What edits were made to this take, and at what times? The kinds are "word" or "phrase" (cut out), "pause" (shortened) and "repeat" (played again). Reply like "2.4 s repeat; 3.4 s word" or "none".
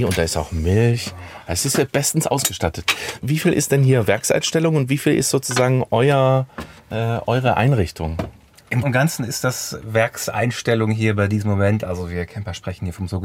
8.8 s word